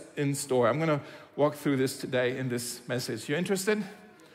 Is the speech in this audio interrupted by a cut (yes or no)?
no